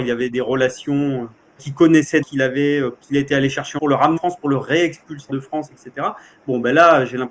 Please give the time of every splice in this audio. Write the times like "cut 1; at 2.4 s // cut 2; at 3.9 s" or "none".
cut 1; at 1.6 s // cut 2; at 2.2 s // cut 3; at 3.0 s // cut 4; at 3.8 s // cut 5; at 4.2 s // cut 6; at 5.3 s